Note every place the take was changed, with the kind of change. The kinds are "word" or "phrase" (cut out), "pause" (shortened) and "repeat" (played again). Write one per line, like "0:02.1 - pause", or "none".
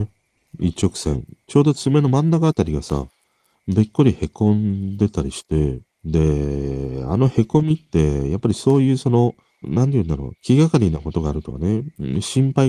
0:05.9 - pause
0:09.5 - pause